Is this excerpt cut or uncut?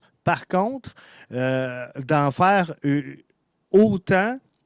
uncut